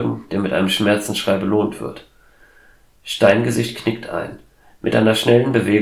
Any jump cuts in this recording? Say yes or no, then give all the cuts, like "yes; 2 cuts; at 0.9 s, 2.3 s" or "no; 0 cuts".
no; 0 cuts